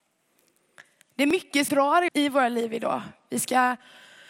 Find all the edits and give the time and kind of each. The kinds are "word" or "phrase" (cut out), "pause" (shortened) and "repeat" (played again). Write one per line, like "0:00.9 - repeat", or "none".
0:01.7 - word
0:02.1 - word